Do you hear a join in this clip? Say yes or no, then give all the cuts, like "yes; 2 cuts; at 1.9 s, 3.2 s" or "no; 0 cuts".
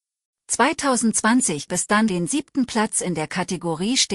yes; 2 cuts; at 1.7 s, 2.1 s